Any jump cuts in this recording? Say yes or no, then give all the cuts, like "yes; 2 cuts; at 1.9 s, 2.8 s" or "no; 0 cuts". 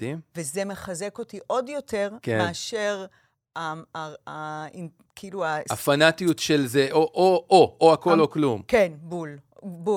no; 0 cuts